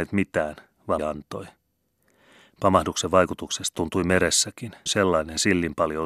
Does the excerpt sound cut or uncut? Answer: cut